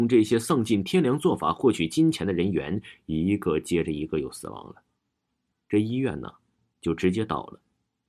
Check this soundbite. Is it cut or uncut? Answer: uncut